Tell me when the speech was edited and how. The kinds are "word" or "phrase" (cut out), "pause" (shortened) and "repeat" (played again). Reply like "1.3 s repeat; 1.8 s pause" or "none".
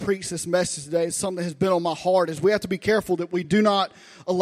none